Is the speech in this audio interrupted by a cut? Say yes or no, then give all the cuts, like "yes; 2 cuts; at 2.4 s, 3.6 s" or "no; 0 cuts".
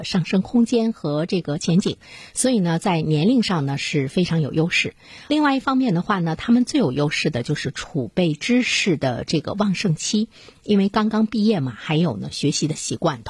no; 0 cuts